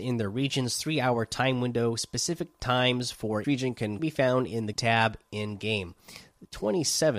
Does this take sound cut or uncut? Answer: cut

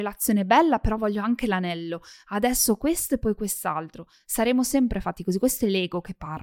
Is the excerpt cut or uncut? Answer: uncut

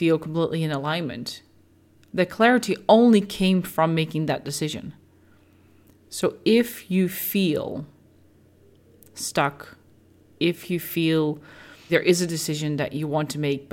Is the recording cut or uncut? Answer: cut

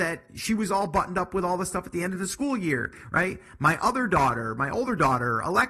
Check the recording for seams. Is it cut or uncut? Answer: uncut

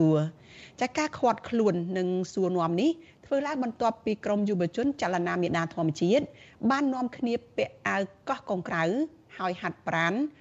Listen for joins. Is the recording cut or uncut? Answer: uncut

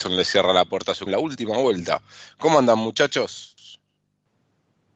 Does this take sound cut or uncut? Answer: cut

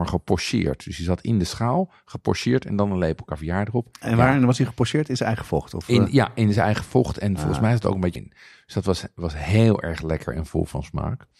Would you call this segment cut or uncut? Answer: cut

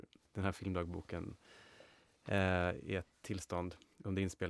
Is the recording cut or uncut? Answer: uncut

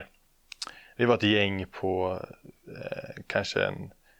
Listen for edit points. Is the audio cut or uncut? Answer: uncut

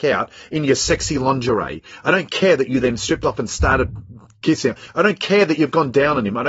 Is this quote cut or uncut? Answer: uncut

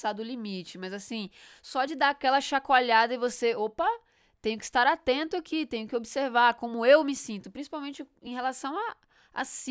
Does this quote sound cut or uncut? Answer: uncut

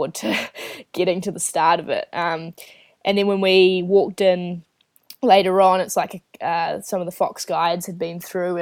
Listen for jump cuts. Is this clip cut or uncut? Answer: uncut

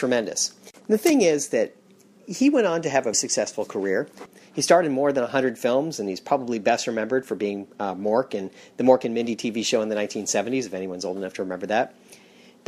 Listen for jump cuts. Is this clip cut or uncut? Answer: cut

